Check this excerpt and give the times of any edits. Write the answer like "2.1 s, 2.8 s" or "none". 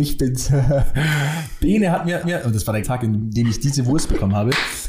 2.2 s, 2.8 s